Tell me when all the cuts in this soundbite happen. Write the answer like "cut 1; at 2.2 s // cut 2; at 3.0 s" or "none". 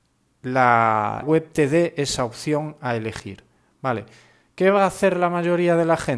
cut 1; at 1.2 s